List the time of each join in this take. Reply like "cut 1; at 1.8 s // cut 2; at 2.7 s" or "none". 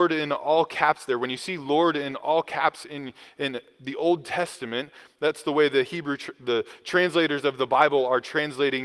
none